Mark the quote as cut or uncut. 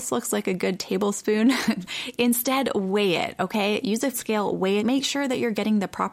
cut